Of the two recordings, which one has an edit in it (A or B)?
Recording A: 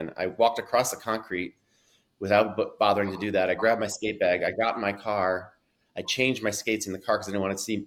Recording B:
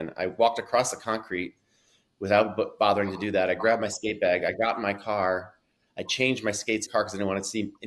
B